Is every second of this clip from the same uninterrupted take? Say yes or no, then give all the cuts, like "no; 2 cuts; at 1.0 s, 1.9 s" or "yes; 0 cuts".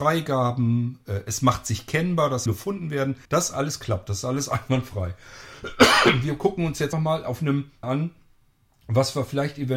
no; 4 cuts; at 2.5 s, 3.2 s, 6.9 s, 7.8 s